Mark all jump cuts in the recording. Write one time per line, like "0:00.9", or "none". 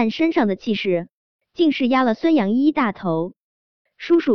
none